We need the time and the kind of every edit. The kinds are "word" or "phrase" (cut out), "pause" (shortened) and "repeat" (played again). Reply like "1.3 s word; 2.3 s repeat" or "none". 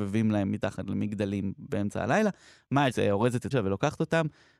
2.9 s word; 3.5 s word